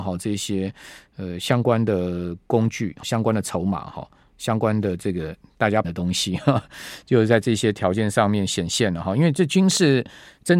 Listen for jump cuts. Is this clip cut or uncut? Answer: cut